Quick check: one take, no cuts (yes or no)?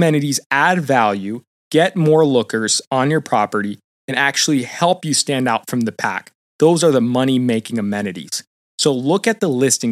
yes